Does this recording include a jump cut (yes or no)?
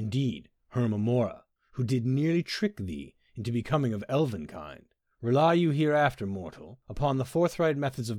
no